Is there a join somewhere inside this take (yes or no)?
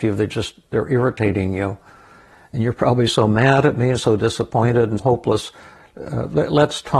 yes